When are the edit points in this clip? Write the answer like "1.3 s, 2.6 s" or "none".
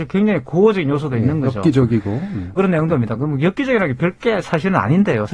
2.6 s, 2.9 s